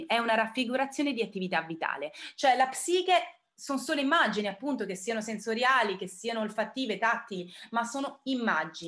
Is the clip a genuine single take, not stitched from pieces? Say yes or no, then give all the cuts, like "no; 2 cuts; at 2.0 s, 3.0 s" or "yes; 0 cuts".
yes; 0 cuts